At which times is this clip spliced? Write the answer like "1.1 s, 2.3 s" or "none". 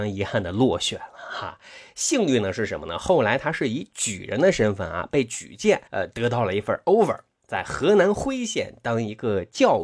5.9 s